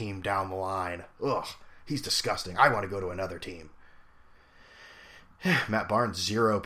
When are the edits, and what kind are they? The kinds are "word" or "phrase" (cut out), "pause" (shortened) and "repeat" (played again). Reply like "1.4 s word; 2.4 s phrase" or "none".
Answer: none